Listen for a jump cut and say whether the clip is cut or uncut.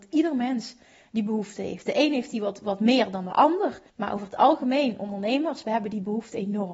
cut